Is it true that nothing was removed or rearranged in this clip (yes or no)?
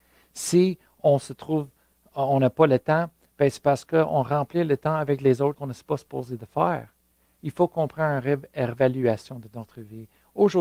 no